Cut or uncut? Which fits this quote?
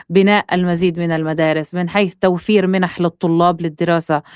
uncut